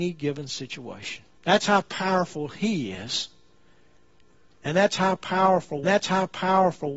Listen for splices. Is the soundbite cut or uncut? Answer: cut